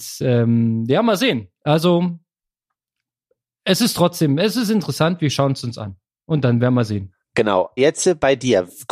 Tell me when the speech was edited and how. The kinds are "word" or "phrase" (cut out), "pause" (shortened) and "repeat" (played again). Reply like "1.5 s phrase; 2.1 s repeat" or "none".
7.8 s word